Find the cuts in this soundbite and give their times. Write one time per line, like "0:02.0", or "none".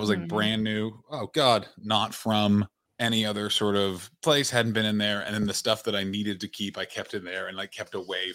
0:02.9